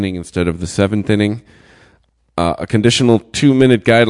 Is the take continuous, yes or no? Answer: yes